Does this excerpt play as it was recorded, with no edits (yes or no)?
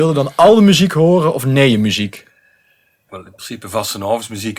no